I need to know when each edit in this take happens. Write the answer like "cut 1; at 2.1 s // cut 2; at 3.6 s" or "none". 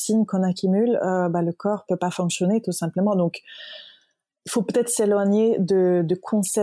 cut 1; at 1.9 s